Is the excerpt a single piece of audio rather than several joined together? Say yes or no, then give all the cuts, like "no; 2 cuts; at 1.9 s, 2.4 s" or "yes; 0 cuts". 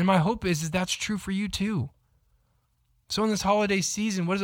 yes; 0 cuts